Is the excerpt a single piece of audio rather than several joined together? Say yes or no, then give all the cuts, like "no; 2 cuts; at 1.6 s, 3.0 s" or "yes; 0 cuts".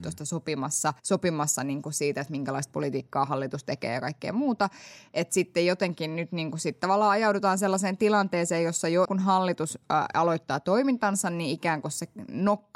no; 2 cuts; at 1.0 s, 9.1 s